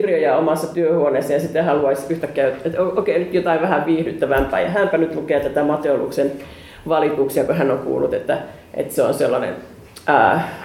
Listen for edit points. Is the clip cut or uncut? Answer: uncut